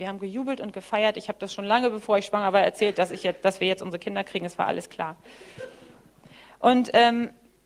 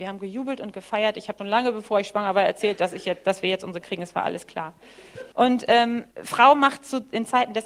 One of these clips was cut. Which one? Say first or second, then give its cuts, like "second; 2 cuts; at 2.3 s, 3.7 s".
second; 4 cuts; at 1.4 s, 3.8 s, 5.3 s, 6.1 s